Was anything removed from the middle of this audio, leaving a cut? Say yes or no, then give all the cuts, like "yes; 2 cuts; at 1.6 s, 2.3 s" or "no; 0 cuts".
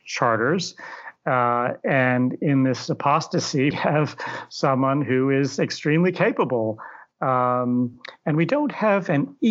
yes; 1 cut; at 3.7 s